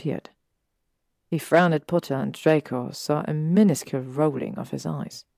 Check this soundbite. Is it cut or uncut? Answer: uncut